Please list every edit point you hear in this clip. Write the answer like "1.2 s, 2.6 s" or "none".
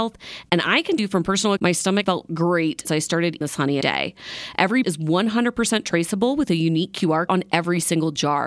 1.0 s, 1.6 s, 2.0 s, 2.8 s, 3.4 s, 3.8 s, 4.8 s, 7.3 s